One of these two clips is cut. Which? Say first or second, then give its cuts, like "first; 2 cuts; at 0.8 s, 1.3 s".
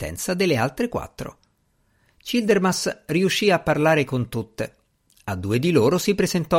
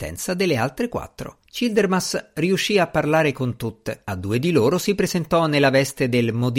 second; 2 cuts; at 1.4 s, 4.0 s